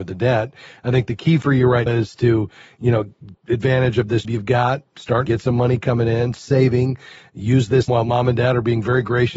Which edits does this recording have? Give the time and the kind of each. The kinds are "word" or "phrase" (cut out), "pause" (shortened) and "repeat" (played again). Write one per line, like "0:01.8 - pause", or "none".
0:01.9 - word
0:03.3 - word
0:04.2 - word
0:05.3 - word
0:06.4 - word
0:07.9 - word

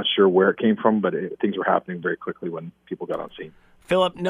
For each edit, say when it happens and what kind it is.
none

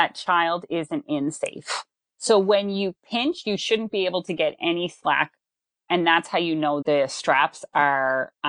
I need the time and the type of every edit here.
0:06.8 - word

